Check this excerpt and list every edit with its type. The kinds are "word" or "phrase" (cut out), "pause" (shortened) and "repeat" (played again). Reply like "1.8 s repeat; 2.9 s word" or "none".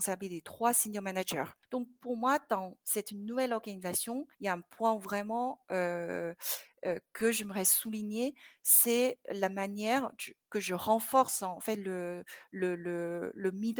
4.3 s pause